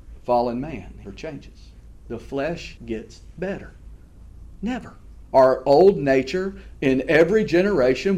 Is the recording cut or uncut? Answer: cut